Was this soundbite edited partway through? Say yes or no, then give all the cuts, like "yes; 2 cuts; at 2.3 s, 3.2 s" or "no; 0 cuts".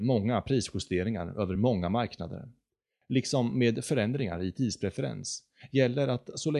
no; 0 cuts